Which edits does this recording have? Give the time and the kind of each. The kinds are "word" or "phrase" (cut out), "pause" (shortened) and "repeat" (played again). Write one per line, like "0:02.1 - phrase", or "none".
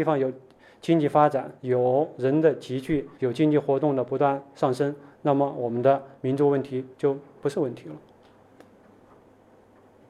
0:01.6 - pause
0:03.1 - pause
0:06.9 - pause